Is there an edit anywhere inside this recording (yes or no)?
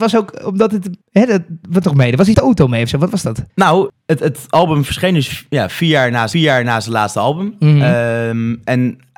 yes